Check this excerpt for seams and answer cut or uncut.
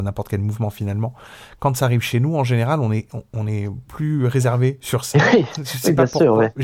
uncut